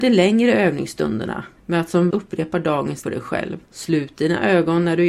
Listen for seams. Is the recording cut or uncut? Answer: cut